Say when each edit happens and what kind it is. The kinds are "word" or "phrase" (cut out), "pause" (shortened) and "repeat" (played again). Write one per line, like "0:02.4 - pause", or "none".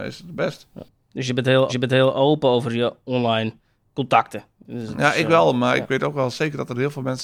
0:01.7 - repeat
0:04.5 - pause